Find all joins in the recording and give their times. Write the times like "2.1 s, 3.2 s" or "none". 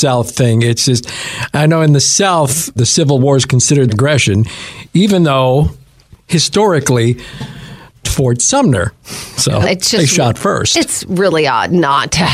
2.8 s, 3.9 s, 8.0 s, 9.6 s